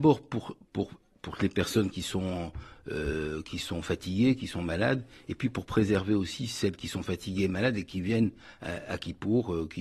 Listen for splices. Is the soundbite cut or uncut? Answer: uncut